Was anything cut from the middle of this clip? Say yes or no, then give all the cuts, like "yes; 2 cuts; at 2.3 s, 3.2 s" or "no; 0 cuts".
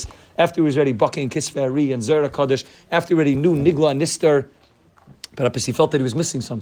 no; 0 cuts